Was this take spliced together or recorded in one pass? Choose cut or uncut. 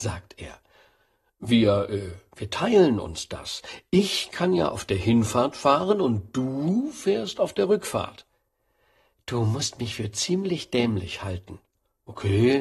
uncut